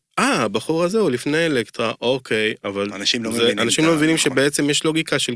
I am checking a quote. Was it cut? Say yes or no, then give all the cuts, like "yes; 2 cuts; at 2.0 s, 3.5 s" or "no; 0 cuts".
no; 0 cuts